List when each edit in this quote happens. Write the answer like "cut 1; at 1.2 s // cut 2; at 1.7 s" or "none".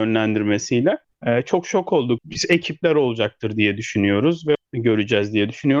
cut 1; at 1.0 s // cut 2; at 2.2 s // cut 3; at 4.5 s

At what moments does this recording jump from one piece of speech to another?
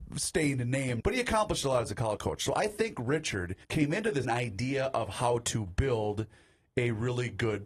cut 1; at 1.0 s // cut 2; at 2.2 s // cut 3; at 3.6 s // cut 4; at 4.2 s

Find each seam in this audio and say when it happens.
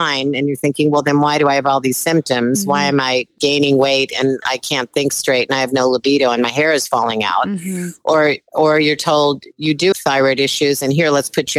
cut 1; at 9.9 s

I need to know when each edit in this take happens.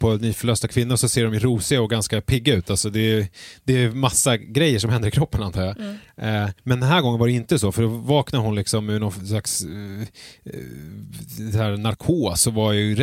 cut 1; at 6.6 s

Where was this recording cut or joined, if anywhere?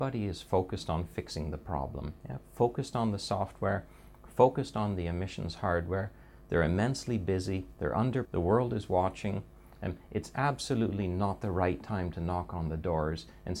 cut 1; at 8.2 s

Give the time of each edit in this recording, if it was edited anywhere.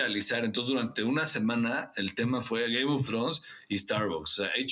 none

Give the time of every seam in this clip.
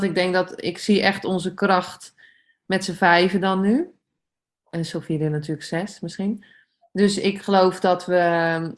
none

